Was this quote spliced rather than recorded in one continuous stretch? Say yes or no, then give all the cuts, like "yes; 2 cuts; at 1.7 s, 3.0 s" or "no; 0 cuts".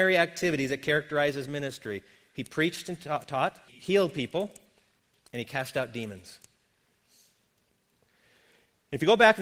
yes; 1 cut; at 3.7 s